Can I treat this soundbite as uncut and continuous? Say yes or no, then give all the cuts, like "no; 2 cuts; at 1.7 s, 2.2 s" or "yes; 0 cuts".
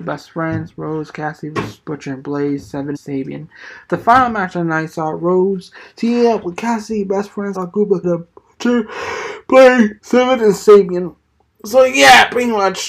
no; 4 cuts; at 2.9 s, 7.5 s, 8.0 s, 10.0 s